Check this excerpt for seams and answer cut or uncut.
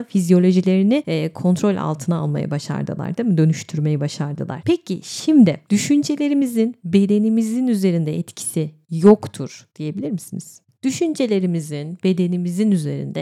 uncut